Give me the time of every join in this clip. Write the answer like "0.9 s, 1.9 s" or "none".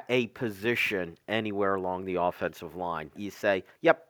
3.2 s